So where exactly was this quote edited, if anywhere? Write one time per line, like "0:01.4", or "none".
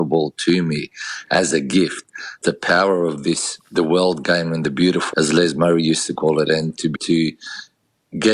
0:02.4
0:05.1
0:07.0